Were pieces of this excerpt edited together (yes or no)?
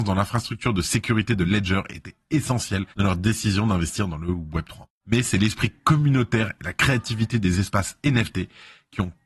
yes